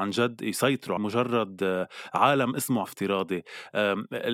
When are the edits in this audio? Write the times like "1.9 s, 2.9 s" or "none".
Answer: 1.0 s, 2.5 s, 2.8 s